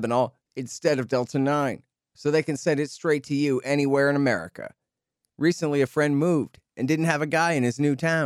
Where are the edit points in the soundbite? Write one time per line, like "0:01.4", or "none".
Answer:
none